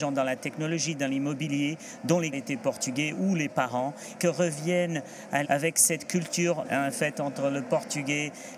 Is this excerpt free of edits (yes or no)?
no